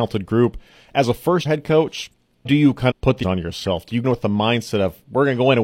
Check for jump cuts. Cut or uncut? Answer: cut